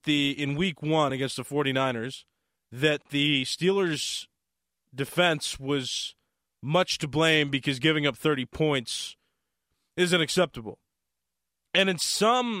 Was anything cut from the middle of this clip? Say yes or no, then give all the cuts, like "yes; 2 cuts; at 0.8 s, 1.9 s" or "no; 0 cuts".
no; 0 cuts